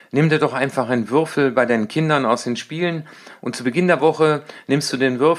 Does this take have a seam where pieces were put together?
no; 0 cuts

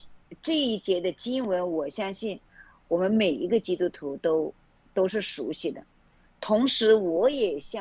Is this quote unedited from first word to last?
yes; 0 cuts

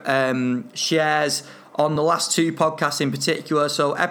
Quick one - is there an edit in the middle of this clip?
no; 0 cuts

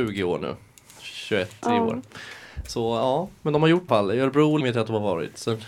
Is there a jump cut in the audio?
yes; 2 cuts; at 3.9 s, 4.6 s

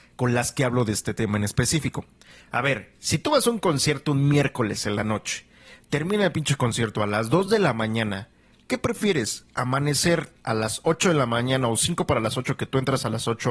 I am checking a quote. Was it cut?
no; 0 cuts

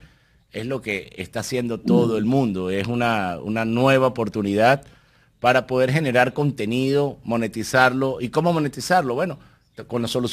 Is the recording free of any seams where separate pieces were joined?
yes; 0 cuts

